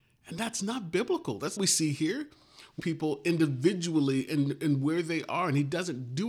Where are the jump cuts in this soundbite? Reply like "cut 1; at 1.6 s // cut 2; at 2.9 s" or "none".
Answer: cut 1; at 1.6 s // cut 2; at 2.8 s